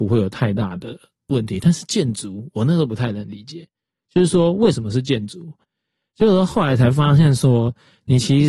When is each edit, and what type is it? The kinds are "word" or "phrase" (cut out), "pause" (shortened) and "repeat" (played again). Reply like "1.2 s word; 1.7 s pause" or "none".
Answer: none